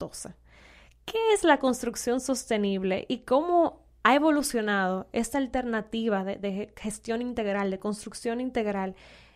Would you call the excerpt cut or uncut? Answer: uncut